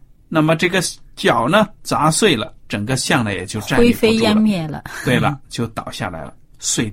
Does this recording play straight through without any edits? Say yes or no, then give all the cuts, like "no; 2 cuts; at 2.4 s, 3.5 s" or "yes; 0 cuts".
no; 1 cut; at 2.6 s